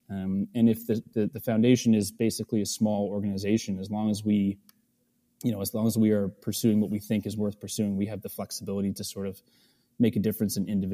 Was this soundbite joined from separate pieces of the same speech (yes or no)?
no